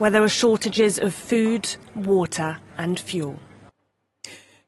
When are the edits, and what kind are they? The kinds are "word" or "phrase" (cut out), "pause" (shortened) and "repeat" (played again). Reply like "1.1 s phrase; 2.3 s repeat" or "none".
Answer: none